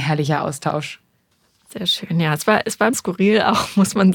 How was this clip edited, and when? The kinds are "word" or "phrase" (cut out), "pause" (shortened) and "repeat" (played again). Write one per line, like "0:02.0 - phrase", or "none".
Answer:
0:02.9 - word